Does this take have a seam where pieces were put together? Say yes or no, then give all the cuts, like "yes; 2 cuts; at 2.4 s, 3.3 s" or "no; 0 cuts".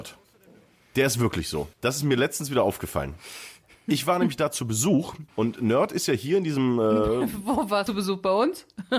yes; 3 cuts; at 1.7 s, 5.3 s, 7.9 s